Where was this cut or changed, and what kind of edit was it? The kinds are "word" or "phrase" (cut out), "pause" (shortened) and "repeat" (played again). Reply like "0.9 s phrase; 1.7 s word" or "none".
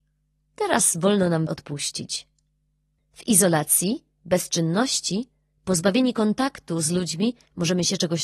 1.5 s word